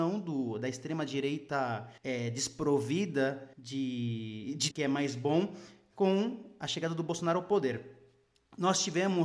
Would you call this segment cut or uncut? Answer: cut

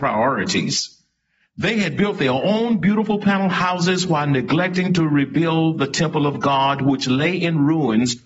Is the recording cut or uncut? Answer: uncut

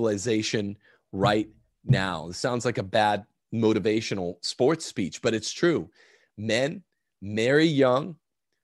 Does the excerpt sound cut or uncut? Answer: uncut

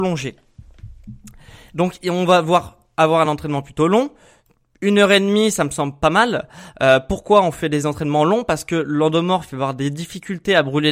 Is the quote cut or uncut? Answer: uncut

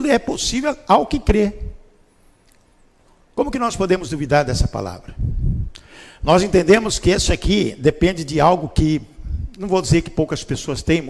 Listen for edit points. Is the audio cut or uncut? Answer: uncut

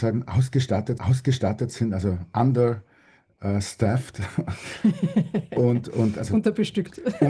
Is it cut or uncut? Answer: cut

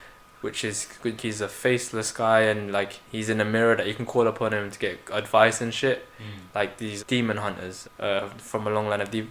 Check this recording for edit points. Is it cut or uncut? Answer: cut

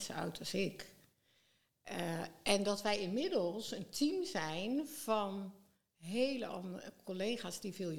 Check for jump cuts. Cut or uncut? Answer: uncut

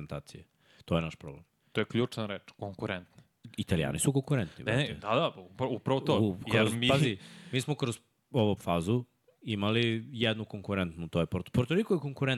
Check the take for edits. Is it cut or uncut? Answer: cut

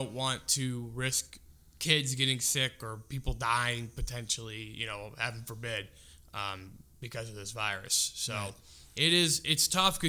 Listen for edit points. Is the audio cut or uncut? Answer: uncut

